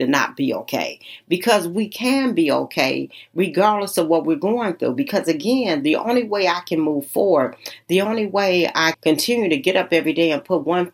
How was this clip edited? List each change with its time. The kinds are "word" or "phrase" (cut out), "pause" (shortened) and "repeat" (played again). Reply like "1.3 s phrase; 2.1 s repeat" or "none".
8.9 s word